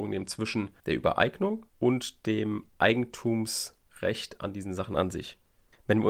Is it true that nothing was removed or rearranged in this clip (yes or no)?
yes